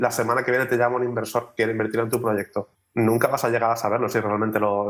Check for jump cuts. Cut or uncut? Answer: cut